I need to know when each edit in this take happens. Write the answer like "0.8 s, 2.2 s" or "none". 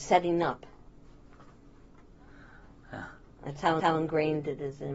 3.8 s